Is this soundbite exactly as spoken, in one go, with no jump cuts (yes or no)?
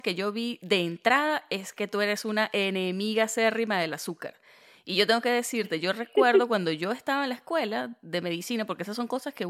yes